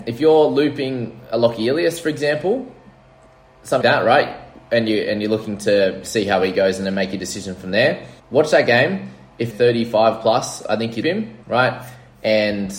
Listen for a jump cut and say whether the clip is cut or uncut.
cut